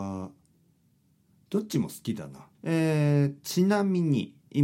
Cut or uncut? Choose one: cut